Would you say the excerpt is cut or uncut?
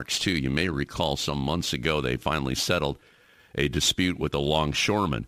uncut